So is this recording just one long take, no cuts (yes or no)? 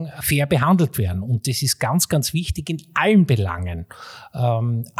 yes